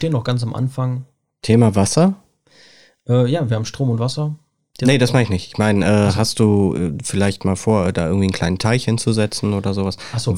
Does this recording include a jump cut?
no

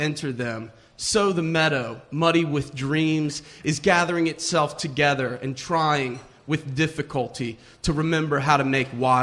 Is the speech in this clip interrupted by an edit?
no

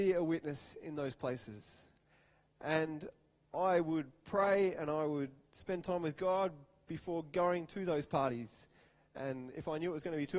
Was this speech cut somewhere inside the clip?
no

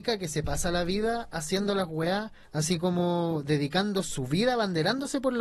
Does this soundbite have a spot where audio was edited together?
yes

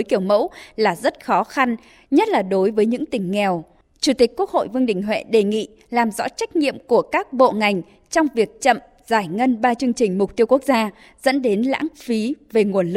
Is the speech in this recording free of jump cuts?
yes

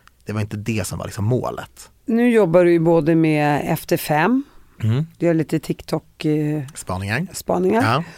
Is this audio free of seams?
no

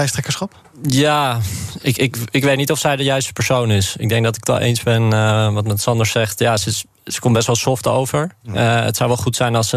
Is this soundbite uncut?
yes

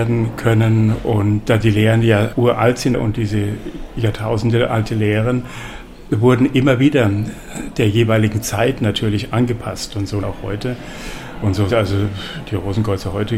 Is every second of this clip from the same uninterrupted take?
no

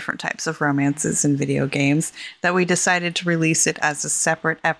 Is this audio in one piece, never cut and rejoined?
yes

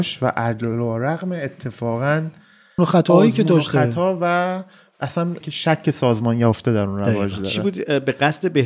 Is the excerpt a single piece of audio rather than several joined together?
no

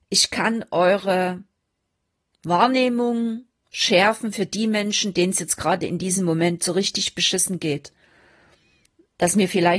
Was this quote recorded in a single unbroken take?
yes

